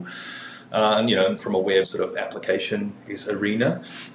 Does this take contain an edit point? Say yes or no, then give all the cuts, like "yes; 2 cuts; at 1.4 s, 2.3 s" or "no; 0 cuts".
yes; 3 cuts; at 1.4 s, 1.8 s, 3.1 s